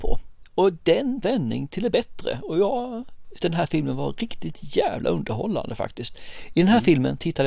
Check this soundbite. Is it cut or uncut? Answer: cut